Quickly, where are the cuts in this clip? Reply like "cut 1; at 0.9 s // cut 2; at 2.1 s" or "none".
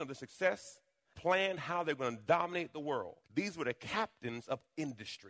cut 1; at 1.1 s // cut 2; at 3.2 s